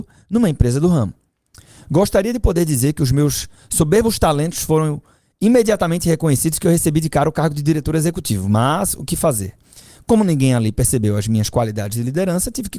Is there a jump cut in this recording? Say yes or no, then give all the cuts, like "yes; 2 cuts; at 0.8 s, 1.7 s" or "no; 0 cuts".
no; 0 cuts